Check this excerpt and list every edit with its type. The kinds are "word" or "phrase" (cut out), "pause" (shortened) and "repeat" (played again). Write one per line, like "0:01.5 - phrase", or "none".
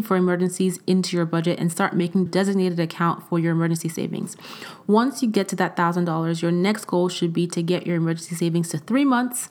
0:02.3 - phrase

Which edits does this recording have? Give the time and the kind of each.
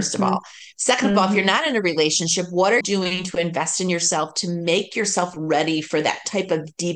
0:02.8 - word

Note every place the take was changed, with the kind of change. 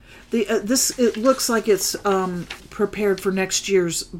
0:02.6 - word

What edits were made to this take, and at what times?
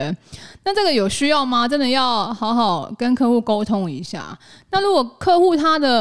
none

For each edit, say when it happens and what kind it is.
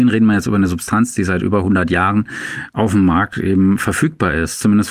none

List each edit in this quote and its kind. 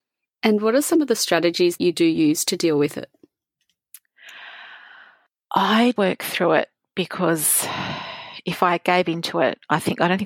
0:01.8 - word
0:06.0 - word

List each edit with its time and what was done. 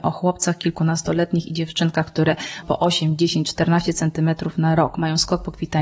0:02.6 - word

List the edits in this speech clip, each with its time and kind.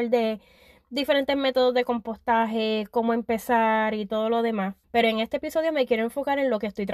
0:04.8 - pause

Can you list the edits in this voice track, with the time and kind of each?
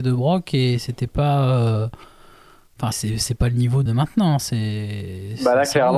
0:02.9 - word
0:03.9 - word

